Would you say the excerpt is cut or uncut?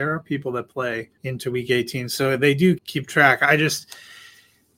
cut